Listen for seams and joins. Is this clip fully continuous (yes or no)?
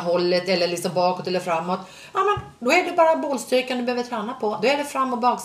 yes